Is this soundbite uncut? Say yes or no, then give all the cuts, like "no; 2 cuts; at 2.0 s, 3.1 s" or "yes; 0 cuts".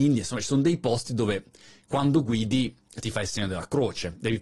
yes; 0 cuts